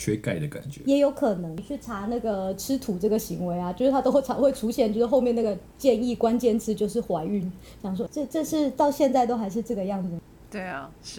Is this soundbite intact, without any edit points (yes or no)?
no